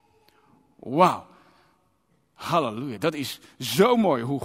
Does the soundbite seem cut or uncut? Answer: uncut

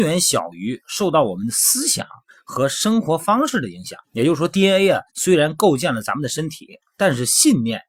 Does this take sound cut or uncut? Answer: cut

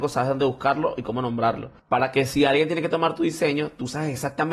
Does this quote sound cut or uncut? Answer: cut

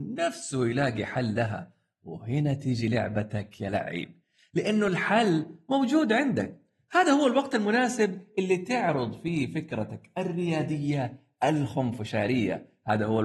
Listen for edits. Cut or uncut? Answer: uncut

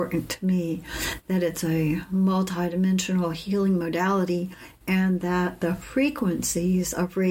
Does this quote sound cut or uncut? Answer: uncut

